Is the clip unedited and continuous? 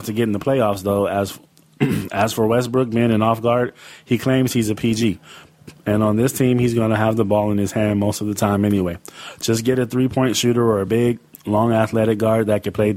yes; 0 cuts

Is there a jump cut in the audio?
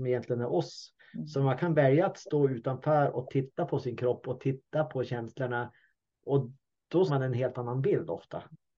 yes; 1 cut; at 7.1 s

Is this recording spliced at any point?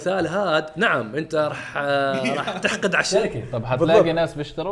no; 0 cuts

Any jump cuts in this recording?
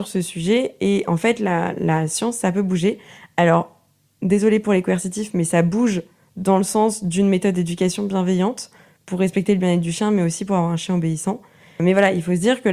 no; 0 cuts

